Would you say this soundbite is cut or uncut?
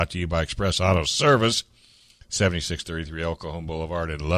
uncut